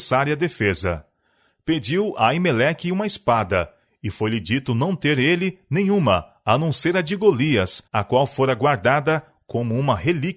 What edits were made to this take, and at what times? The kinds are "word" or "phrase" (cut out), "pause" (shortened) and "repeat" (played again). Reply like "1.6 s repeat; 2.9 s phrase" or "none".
7.9 s pause